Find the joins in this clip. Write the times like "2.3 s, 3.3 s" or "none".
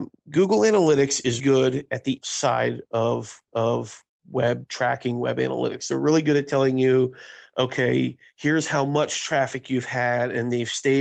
1.4 s, 2.2 s, 3.5 s